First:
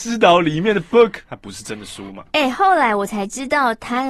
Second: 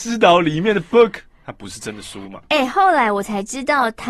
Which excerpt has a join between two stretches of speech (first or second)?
first